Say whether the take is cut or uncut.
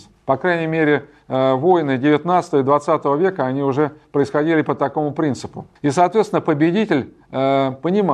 cut